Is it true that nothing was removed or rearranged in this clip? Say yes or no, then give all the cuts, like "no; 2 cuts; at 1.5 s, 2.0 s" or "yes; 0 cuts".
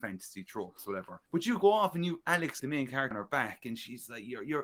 no; 3 cuts; at 1.3 s, 2.6 s, 3.1 s